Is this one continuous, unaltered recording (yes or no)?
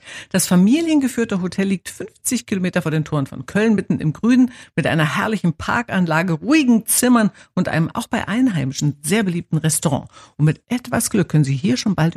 yes